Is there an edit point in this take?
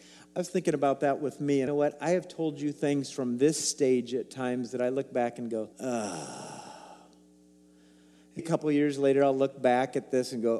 yes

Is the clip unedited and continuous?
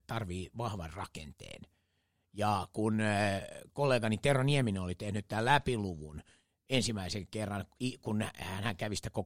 yes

